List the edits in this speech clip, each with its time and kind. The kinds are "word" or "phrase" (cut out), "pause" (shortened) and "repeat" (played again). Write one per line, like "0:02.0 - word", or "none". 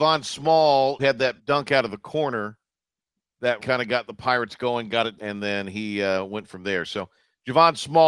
0:01.0 - word
0:01.4 - pause
0:03.6 - word
0:05.2 - phrase